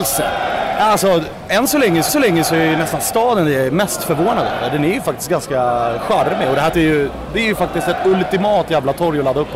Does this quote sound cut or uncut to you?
cut